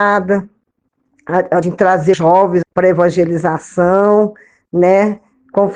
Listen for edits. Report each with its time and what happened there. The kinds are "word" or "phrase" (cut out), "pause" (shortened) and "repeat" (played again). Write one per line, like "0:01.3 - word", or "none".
0:01.6 - word
0:02.1 - word
0:02.6 - word